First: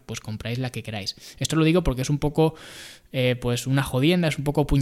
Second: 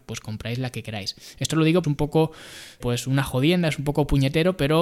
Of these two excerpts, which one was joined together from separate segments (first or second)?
second